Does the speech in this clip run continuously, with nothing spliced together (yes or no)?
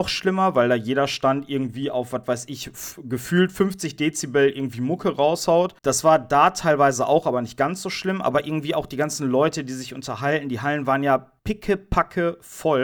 no